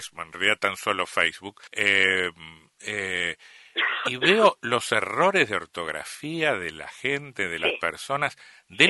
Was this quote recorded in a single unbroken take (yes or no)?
no